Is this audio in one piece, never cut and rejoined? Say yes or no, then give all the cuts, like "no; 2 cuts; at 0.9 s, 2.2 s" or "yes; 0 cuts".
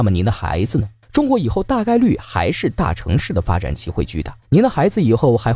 no; 2 cuts; at 1.0 s, 4.4 s